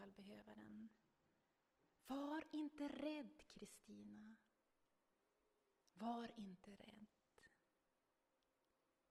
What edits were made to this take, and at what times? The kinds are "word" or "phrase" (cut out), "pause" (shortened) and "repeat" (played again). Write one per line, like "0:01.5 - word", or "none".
none